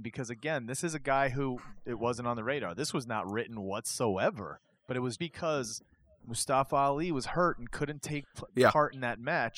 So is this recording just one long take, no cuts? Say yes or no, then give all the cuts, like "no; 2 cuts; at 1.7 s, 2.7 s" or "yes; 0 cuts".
no; 1 cut; at 5.2 s